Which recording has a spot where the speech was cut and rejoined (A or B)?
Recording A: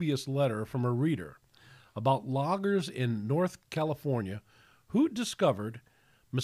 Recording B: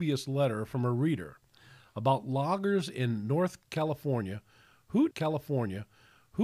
B